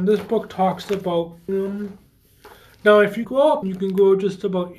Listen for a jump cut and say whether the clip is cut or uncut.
cut